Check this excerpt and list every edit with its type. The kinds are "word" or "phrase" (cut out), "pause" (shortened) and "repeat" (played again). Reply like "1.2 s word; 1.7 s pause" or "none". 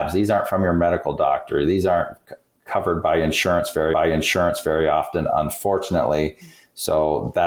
3.9 s repeat